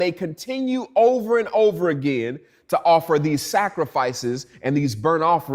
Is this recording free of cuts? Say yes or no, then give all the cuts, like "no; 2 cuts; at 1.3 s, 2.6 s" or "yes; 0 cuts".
yes; 0 cuts